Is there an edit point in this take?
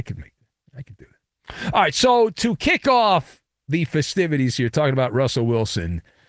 no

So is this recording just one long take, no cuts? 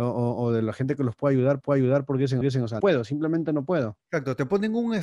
no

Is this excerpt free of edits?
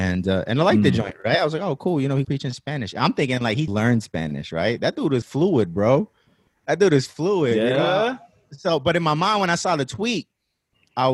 no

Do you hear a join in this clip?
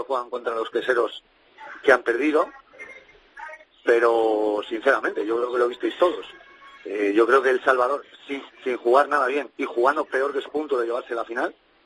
yes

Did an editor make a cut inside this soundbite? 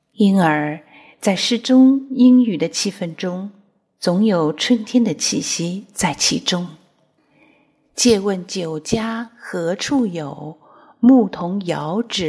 no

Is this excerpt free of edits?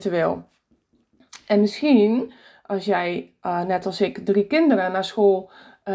yes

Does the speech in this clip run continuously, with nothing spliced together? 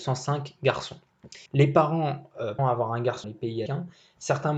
no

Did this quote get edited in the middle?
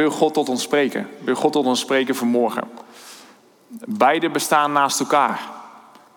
no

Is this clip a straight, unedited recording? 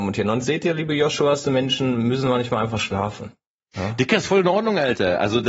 yes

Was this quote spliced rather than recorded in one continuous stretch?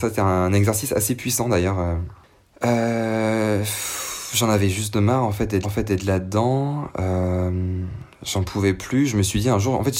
yes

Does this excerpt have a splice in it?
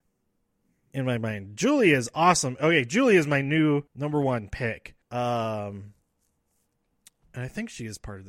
yes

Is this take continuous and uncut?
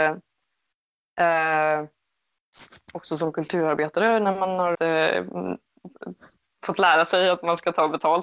no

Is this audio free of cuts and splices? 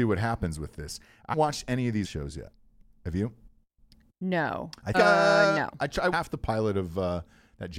no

